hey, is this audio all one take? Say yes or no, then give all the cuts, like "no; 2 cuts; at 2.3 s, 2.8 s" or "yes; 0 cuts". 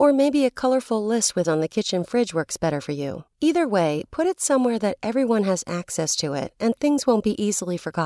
no; 2 cuts; at 1.4 s, 3.3 s